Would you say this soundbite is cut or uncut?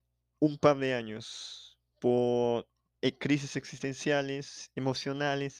uncut